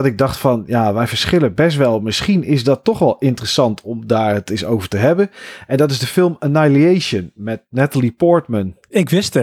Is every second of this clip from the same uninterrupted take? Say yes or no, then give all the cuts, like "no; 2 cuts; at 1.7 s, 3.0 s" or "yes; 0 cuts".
yes; 0 cuts